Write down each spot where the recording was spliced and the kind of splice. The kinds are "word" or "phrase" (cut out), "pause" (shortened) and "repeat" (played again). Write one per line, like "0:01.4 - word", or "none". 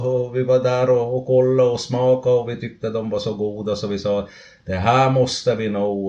none